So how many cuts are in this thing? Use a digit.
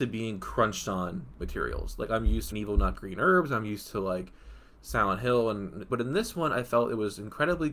4